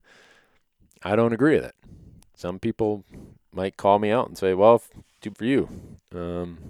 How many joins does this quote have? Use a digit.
1